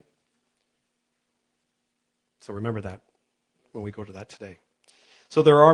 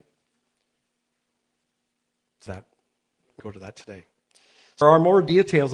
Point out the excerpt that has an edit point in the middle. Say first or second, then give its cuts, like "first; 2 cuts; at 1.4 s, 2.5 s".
second; 3 cuts; at 2.5 s, 3.4 s, 4.8 s